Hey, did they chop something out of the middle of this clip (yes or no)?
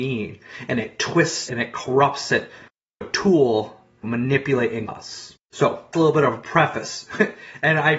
yes